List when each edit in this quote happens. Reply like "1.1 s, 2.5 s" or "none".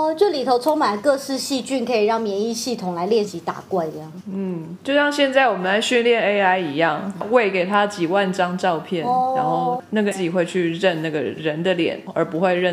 10.1 s